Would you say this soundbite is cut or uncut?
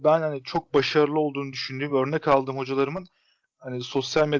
uncut